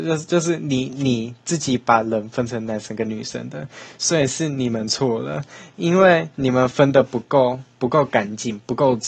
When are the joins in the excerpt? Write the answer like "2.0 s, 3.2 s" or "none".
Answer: 6.3 s, 7.7 s